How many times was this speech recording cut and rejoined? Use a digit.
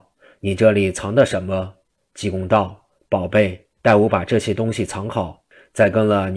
1